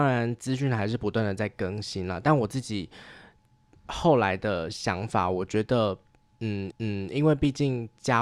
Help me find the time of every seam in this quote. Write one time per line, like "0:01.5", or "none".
0:06.7